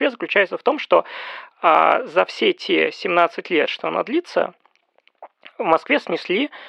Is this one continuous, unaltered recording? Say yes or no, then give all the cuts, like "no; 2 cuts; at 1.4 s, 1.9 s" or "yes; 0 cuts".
yes; 0 cuts